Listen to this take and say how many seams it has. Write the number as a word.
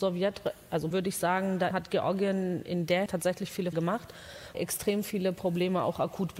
five